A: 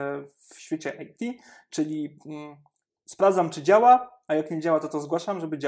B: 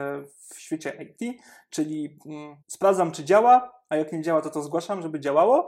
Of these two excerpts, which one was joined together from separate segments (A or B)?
B